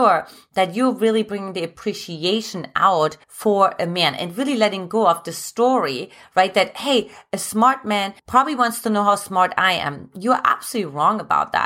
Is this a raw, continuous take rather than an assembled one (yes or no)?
no